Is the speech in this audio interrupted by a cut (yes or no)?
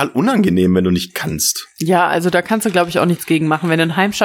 no